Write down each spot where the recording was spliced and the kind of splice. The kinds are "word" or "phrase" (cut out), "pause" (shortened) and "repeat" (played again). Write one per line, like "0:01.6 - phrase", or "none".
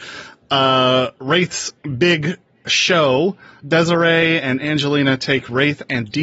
0:01.8 - pause
0:03.6 - word